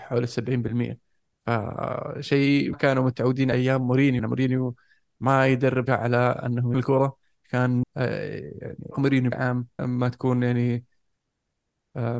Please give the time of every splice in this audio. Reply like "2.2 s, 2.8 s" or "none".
2.7 s, 3.5 s, 4.2 s, 5.9 s, 6.7 s, 7.8 s, 8.9 s, 9.3 s, 9.8 s